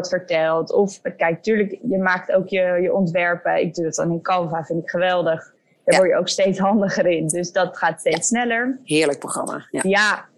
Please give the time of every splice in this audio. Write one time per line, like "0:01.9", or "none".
none